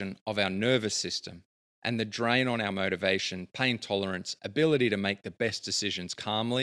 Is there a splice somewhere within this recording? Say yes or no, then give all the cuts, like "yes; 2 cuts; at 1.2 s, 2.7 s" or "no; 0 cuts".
no; 0 cuts